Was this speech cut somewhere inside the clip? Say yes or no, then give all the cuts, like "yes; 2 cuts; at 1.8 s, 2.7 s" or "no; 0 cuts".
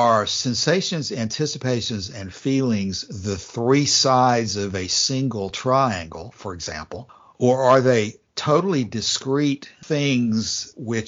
no; 0 cuts